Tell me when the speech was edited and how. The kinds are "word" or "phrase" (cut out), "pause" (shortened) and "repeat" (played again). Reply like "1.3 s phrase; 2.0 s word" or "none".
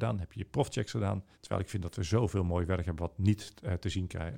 1.3 s pause

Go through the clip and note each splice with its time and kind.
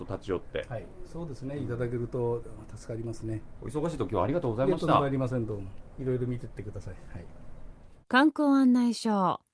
8.0 s pause

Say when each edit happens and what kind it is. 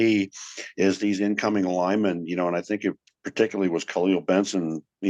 none

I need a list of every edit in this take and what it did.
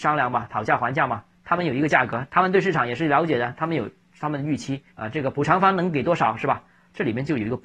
4.9 s pause

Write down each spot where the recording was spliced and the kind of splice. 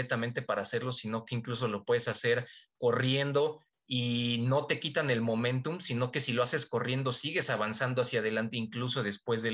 none

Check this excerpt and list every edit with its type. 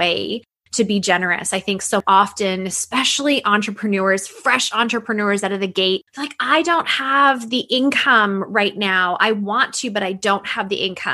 6.1 s pause

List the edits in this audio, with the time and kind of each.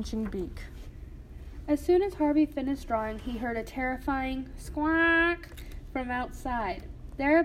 none

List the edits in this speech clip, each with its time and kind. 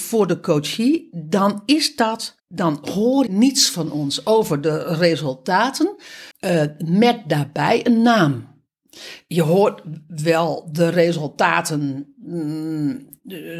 2.4 s pause; 3.3 s word; 6.3 s pause

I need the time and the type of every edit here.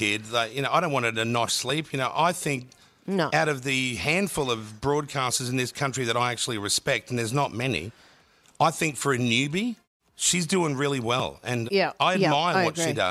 1.5 s word; 11.7 s word

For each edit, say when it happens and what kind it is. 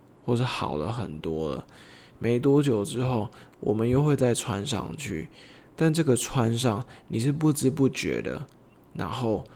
none

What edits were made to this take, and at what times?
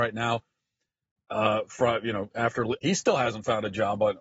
2.8 s phrase

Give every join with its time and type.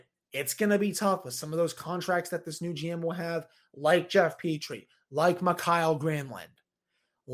none

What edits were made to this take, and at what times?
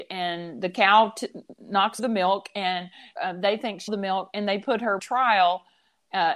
2.0 s word; 3.2 s word; 3.9 s word; 5.0 s word

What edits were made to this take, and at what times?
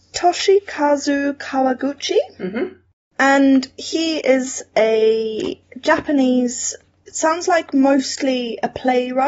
none

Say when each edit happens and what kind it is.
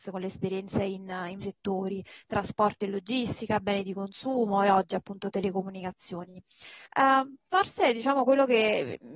1.4 s word; 6.9 s pause

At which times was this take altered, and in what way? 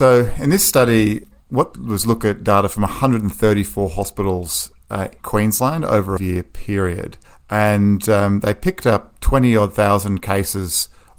1.7 s phrase; 5.2 s word; 6.2 s phrase; 7.2 s pause

